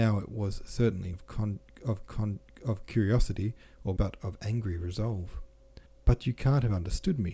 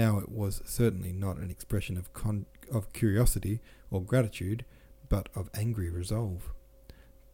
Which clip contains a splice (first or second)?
first